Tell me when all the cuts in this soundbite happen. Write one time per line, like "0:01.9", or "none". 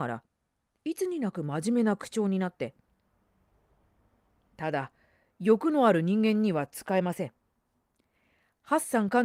none